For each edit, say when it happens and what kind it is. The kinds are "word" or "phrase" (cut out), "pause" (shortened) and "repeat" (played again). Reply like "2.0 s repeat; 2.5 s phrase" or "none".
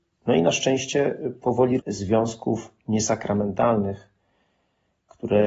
1.8 s phrase